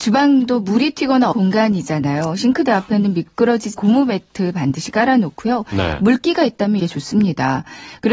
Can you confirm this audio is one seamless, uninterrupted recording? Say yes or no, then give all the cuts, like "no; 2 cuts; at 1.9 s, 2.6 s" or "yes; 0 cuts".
no; 3 cuts; at 1.3 s, 3.7 s, 6.8 s